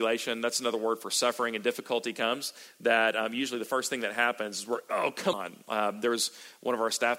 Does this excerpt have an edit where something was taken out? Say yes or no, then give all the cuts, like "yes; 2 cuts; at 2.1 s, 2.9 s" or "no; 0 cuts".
yes; 1 cut; at 5.3 s